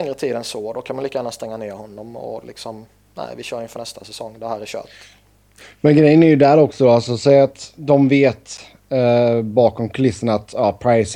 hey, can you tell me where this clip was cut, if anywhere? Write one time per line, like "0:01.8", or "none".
none